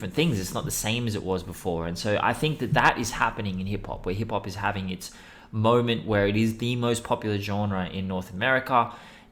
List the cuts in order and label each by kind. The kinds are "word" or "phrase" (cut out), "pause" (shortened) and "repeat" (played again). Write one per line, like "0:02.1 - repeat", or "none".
none